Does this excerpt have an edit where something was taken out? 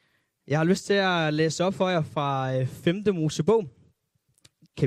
no; 0 cuts

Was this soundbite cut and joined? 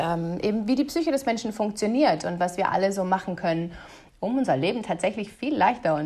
no; 0 cuts

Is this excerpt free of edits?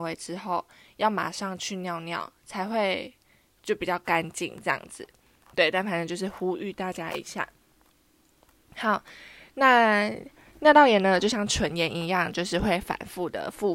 yes; 0 cuts

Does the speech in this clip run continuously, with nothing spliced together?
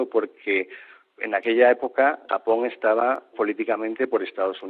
no; 2 cuts; at 2.3 s, 3.3 s

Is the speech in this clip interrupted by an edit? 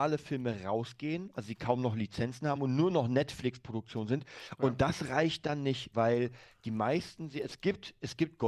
no; 0 cuts

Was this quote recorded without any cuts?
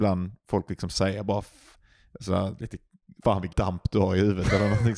no; 2 cuts; at 3.2 s, 3.5 s

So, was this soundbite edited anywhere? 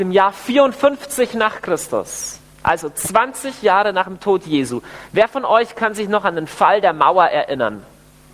no; 0 cuts

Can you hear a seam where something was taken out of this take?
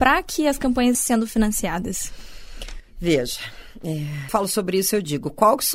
yes; 2 cuts; at 0.9 s, 4.3 s

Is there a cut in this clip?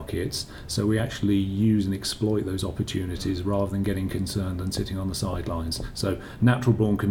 no; 0 cuts

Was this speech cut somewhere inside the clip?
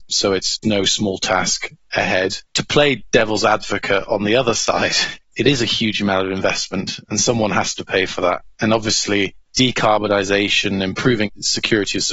yes; 1 cut; at 2.4 s

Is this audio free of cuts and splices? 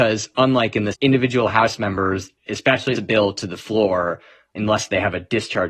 no; 3 cuts; at 0.9 s, 2.4 s, 3.0 s

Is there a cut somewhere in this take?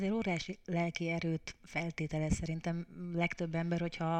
no; 0 cuts

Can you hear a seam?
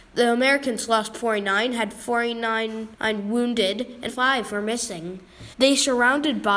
yes; 3 cuts; at 2.9 s, 4.1 s, 5.5 s

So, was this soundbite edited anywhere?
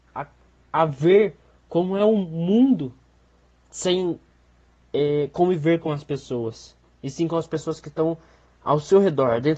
no; 0 cuts

